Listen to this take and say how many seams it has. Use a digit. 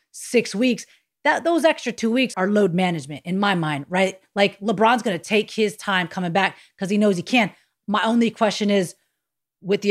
1